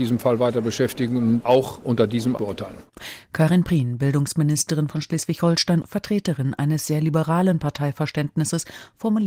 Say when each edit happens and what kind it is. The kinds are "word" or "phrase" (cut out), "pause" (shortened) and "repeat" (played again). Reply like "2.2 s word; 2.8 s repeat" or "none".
1.4 s word; 2.4 s word; 5.8 s word